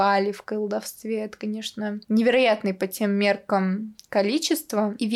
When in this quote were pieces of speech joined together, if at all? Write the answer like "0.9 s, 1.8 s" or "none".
none

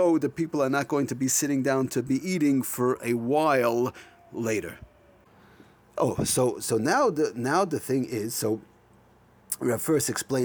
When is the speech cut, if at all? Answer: none

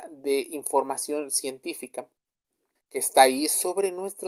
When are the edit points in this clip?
2.8 s

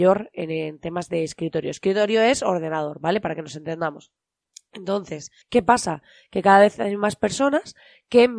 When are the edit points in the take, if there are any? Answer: 5.4 s

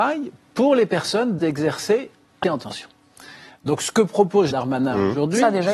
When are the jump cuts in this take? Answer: 1.4 s, 2.4 s, 4.5 s

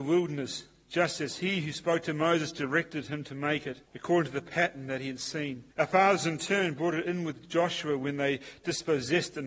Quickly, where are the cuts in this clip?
3.9 s, 5.7 s

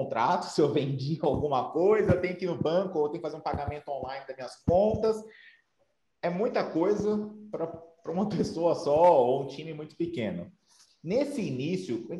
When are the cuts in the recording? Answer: none

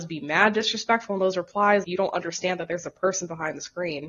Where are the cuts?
1.8 s

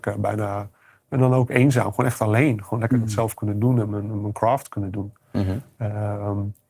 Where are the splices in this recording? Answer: none

